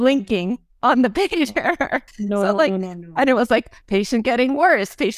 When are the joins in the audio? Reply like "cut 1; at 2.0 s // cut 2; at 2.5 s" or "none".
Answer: cut 1; at 2.1 s

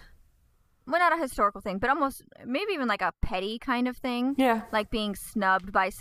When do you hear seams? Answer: none

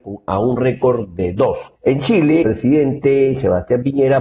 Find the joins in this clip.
cut 1; at 1.8 s // cut 2; at 2.4 s

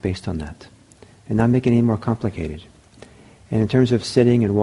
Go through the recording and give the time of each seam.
none

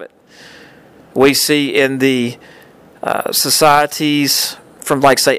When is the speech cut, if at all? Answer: none

